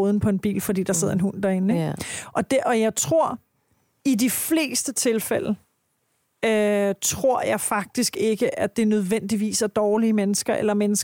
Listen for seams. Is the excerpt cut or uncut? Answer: uncut